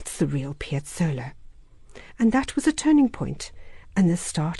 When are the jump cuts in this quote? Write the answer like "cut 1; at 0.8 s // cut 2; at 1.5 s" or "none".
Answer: none